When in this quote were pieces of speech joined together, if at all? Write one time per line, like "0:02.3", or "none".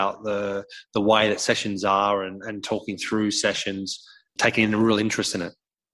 0:04.4